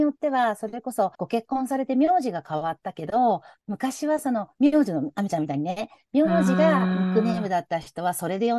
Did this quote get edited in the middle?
yes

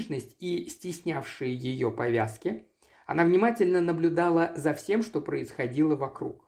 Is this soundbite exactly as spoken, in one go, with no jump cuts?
yes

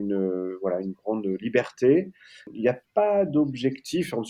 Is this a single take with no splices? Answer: yes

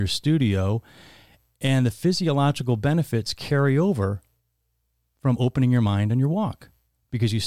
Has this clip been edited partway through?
no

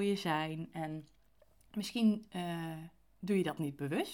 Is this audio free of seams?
yes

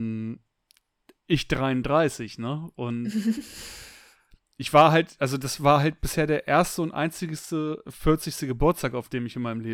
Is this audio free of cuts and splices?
yes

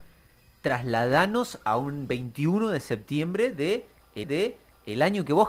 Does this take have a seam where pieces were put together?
yes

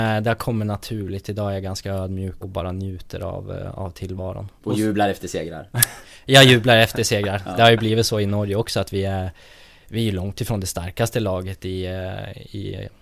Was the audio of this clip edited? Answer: yes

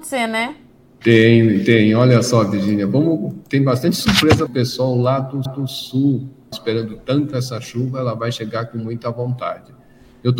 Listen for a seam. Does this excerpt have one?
yes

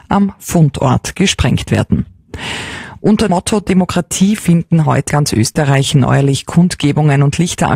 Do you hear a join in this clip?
yes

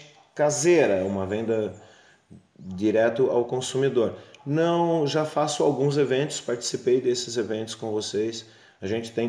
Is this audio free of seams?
yes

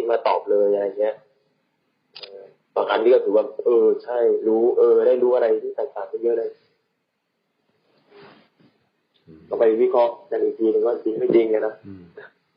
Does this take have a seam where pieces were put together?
no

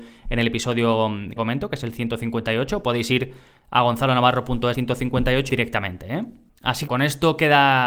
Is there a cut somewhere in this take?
yes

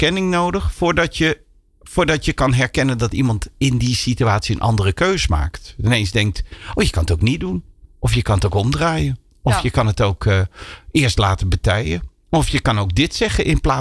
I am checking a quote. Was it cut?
no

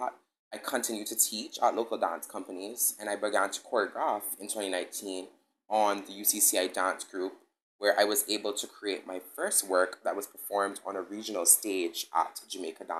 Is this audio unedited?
yes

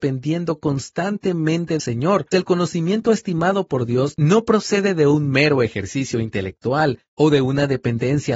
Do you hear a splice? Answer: yes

